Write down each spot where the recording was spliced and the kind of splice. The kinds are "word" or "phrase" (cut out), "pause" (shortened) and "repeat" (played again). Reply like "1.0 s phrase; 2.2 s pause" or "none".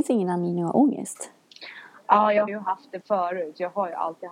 2.5 s word; 3.0 s word